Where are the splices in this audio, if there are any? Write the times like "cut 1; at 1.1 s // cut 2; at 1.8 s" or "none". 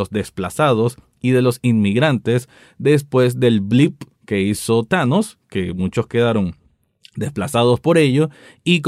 none